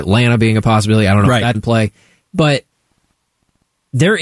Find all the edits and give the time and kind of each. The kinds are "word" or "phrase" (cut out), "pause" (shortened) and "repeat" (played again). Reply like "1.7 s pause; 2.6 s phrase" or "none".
1.5 s word